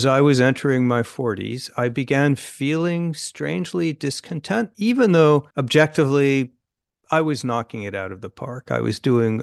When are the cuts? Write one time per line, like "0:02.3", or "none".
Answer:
0:04.7
0:05.5